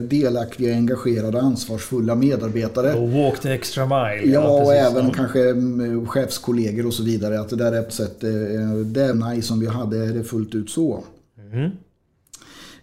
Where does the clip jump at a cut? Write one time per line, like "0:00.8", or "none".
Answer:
0:07.9
0:09.1